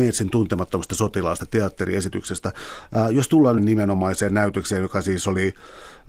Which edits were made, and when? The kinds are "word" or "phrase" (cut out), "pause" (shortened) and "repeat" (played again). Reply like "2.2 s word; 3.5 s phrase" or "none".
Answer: 3.6 s phrase